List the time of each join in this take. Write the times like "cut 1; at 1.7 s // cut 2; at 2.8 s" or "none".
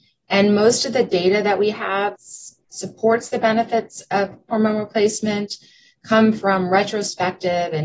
cut 1; at 2.2 s // cut 2; at 4.5 s